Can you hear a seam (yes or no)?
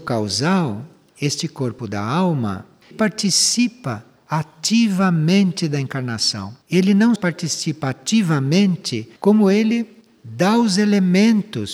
yes